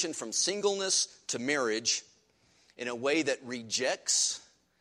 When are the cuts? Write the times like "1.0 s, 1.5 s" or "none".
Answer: none